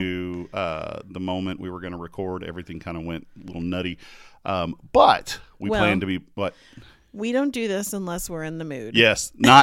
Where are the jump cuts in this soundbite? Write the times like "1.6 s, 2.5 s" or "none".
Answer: none